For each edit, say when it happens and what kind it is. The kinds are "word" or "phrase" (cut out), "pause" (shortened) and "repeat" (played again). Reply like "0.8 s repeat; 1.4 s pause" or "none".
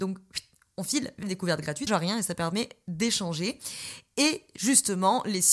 1.2 s word; 1.9 s phrase

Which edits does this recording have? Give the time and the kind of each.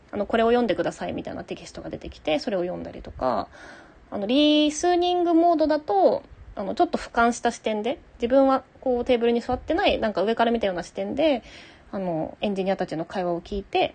8.7 s pause

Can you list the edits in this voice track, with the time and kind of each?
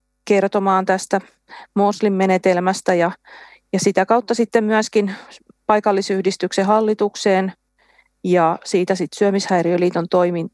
none

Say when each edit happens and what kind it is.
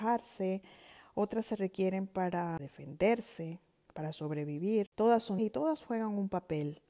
2.6 s word; 5.4 s word

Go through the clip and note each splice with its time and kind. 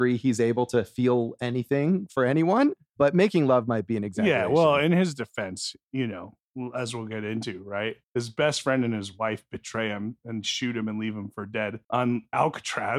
8.0 s pause; 11.8 s pause

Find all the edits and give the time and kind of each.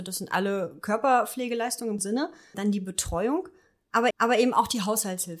2.0 s word; 2.5 s word; 4.1 s repeat

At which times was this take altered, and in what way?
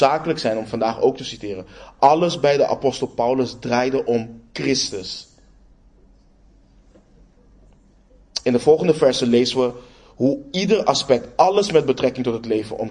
none

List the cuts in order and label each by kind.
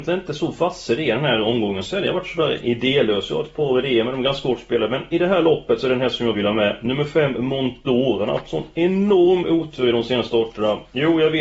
6.3 s word

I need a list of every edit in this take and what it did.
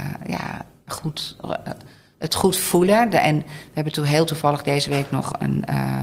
none

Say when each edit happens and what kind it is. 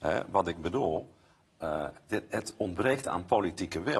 none

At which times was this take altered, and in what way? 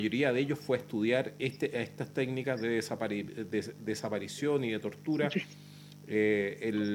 none

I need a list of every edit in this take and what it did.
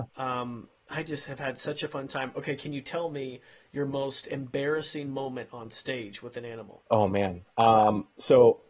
none

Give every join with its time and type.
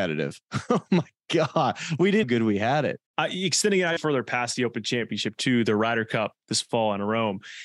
2.2 s phrase; 3.1 s pause; 4.0 s word

